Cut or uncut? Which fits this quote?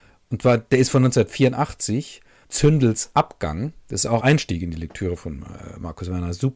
cut